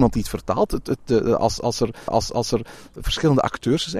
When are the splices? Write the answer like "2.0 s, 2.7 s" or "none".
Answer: 2.1 s